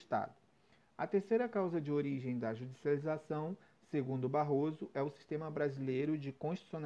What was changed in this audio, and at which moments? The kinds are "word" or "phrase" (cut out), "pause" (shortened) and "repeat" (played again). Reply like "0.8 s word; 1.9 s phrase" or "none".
none